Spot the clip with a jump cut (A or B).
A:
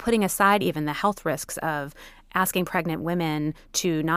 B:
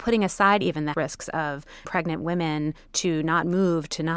B